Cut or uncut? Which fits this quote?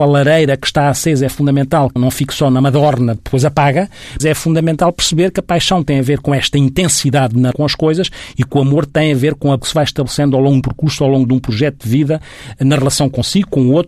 cut